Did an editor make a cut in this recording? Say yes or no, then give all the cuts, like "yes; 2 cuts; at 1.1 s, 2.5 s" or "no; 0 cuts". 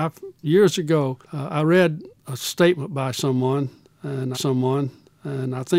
yes; 2 cuts; at 1.2 s, 4.3 s